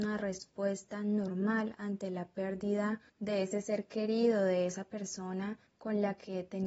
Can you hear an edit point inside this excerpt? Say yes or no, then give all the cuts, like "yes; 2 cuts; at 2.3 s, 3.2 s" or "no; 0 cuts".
yes; 2 cuts; at 3.1 s, 5.7 s